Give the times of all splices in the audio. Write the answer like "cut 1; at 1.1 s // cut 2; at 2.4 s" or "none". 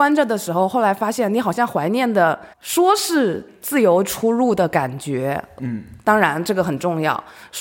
cut 1; at 2.5 s